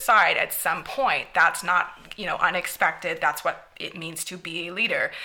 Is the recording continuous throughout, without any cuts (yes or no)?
yes